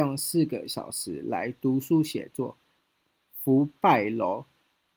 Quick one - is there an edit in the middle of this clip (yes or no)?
no